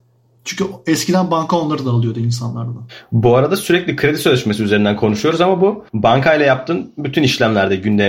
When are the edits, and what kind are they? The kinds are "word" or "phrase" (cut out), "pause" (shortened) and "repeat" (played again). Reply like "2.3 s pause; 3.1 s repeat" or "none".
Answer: 5.9 s pause